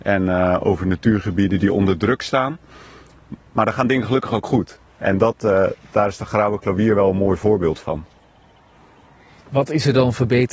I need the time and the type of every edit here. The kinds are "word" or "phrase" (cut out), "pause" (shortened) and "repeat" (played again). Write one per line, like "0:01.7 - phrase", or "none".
none